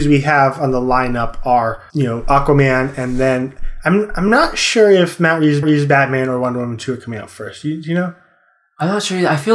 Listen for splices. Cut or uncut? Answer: cut